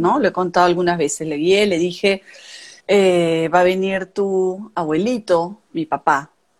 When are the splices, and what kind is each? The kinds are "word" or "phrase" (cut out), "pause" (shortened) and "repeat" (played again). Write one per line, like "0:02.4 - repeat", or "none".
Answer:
0:02.8 - pause